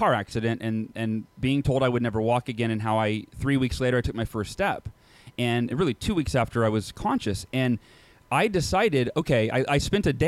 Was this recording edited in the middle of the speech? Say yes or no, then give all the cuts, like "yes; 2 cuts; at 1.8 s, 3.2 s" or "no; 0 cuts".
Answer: no; 0 cuts